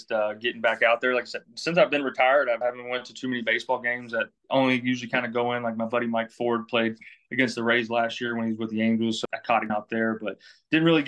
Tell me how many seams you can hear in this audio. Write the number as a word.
three